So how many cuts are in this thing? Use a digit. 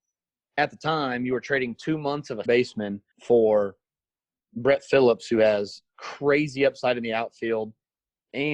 2